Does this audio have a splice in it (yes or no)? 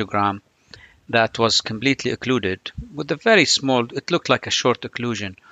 no